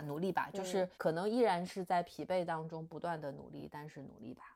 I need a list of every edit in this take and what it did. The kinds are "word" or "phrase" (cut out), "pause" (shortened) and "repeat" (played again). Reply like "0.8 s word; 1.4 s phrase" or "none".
0.9 s pause